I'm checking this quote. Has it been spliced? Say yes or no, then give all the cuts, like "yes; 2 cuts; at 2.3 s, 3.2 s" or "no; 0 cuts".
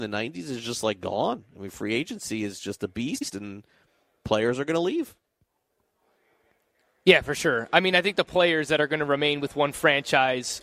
no; 0 cuts